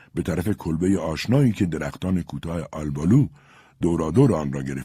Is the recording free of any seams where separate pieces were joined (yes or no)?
yes